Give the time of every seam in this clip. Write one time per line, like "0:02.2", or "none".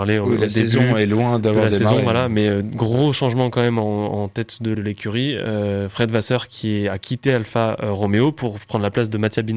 0:04.7

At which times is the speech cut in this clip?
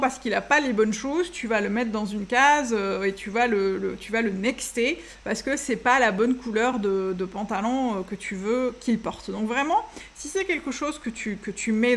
none

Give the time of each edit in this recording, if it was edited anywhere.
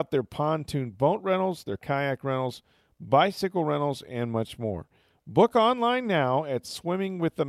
none

